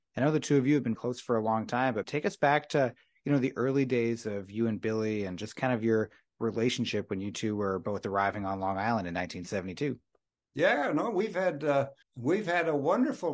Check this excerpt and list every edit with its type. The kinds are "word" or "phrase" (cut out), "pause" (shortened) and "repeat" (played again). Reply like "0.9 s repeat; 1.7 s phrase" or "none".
0.9 s word; 2.0 s word; 12.0 s pause